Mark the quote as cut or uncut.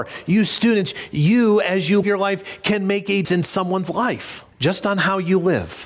cut